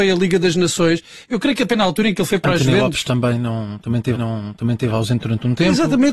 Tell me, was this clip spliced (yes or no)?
yes